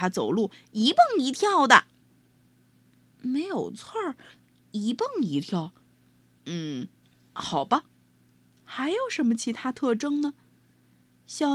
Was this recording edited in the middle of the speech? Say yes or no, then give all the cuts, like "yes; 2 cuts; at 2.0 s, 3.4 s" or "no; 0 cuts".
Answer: no; 0 cuts